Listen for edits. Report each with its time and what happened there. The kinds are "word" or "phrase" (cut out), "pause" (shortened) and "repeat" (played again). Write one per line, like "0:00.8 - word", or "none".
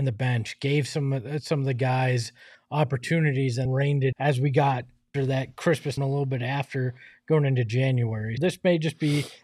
0:03.7 - word
0:04.1 - word
0:05.1 - word
0:06.0 - word
0:08.4 - word